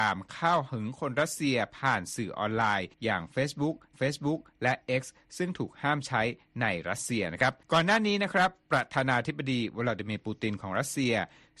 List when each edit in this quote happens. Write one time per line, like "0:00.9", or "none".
0:02.9
0:03.9
0:07.6